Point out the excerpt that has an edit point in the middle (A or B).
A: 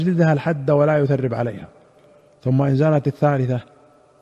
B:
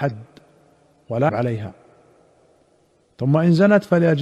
B